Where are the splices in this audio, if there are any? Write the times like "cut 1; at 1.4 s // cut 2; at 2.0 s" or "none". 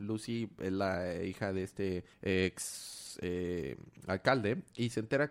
cut 1; at 2.1 s